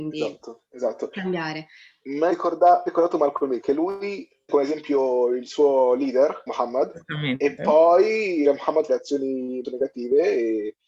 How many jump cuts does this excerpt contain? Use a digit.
8